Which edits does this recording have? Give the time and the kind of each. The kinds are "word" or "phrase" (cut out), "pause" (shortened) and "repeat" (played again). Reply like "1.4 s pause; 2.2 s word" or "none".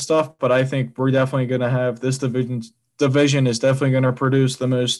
none